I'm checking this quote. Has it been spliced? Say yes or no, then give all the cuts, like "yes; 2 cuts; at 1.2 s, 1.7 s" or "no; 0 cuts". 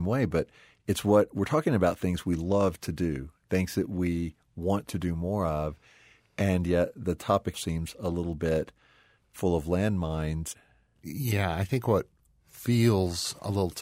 yes; 1 cut; at 7.5 s